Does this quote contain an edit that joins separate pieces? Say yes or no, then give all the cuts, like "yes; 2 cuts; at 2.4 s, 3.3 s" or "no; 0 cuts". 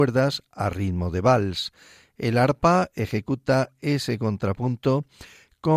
no; 0 cuts